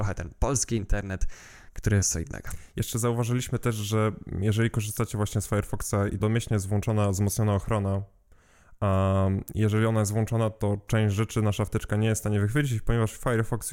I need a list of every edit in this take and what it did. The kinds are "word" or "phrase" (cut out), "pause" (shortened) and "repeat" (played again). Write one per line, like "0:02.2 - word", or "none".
0:02.0 - phrase
0:06.2 - word